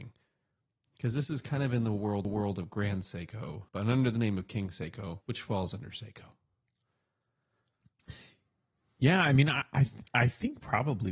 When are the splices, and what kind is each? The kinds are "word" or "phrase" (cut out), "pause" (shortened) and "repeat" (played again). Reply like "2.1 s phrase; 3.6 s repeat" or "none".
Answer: 2.2 s repeat; 3.7 s pause; 5.2 s pause